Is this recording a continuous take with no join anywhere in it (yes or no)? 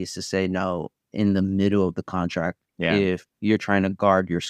no